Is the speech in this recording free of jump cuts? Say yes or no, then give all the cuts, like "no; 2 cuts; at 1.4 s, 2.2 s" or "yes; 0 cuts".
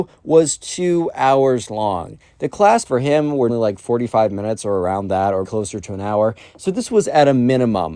no; 3 cuts; at 2.9 s, 3.5 s, 5.4 s